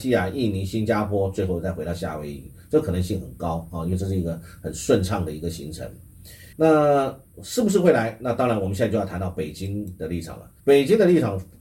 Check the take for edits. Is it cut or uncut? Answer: cut